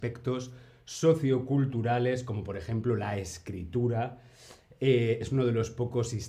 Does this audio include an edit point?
no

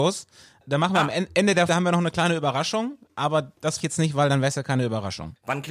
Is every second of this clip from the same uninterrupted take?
no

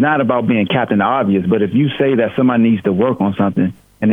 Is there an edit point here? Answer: no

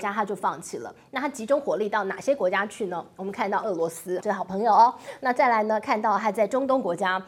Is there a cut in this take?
yes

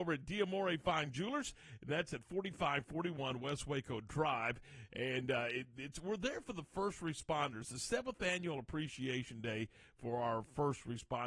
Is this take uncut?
yes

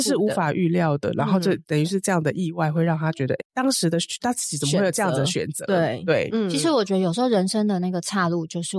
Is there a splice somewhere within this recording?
yes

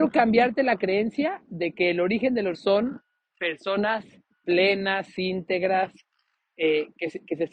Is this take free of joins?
no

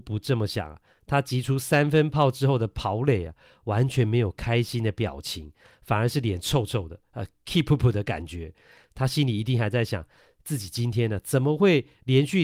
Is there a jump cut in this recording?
no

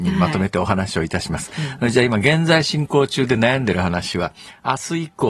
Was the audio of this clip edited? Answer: no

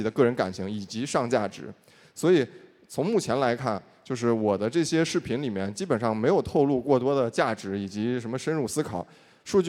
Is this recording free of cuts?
yes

